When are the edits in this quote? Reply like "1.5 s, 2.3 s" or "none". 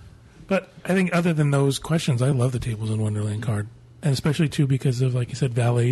none